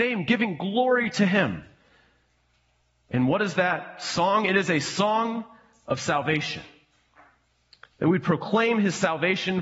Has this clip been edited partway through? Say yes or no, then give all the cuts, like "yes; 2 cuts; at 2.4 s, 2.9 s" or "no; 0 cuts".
no; 0 cuts